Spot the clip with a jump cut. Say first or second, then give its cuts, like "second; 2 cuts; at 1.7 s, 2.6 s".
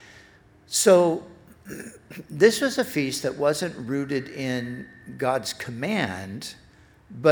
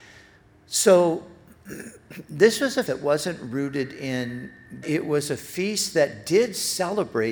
second; 2 cuts; at 2.9 s, 4.8 s